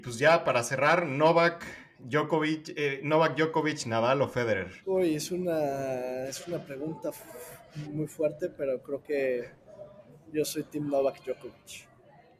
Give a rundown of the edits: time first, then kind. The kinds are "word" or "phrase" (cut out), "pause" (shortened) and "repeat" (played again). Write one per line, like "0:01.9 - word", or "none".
0:04.8 - pause
0:07.8 - word